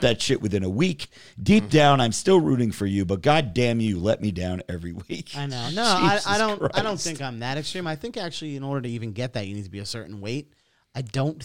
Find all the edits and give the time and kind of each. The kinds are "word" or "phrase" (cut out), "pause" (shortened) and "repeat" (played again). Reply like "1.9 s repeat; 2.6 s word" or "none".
none